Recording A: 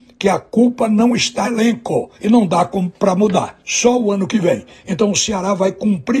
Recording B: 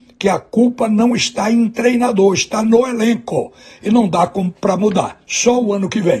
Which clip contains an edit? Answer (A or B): A